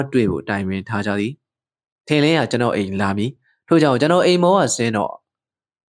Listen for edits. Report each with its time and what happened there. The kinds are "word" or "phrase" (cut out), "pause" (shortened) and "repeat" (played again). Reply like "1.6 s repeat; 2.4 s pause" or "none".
none